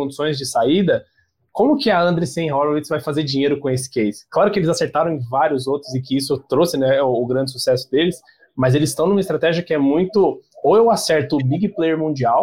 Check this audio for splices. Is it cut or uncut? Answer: uncut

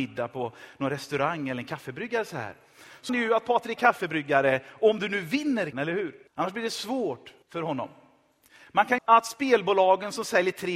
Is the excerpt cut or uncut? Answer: cut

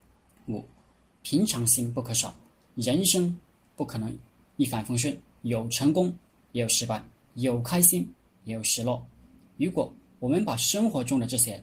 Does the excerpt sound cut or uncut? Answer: uncut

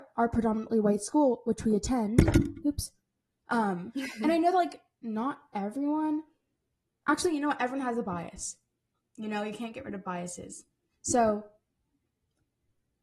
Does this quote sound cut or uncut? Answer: uncut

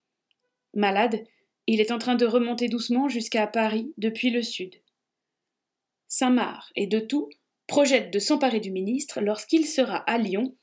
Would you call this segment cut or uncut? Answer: uncut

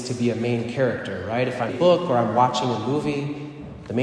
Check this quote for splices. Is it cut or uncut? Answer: cut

